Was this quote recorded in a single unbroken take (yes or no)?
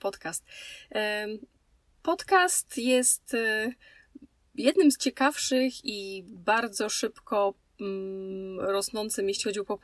yes